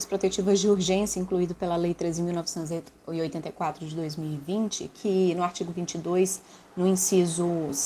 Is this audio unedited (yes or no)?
yes